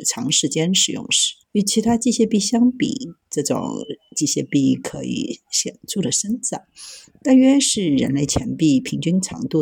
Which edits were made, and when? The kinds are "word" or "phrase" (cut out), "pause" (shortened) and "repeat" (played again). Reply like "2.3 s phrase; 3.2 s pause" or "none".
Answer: 1.4 s pause